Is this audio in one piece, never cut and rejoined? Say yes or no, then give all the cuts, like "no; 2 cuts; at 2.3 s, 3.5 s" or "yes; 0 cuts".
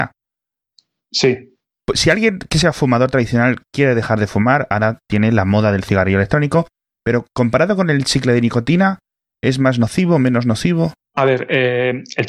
yes; 0 cuts